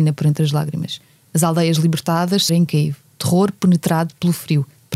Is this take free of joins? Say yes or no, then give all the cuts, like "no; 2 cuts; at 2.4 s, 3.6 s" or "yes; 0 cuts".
no; 1 cut; at 2.5 s